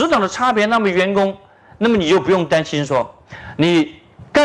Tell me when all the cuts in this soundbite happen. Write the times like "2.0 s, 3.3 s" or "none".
none